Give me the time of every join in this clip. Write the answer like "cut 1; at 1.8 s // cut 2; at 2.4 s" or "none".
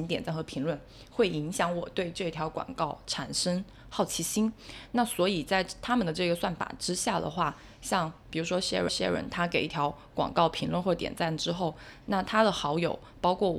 cut 1; at 8.9 s